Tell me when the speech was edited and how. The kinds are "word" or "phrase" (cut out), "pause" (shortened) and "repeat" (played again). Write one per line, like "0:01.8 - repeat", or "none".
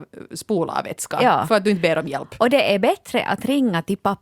none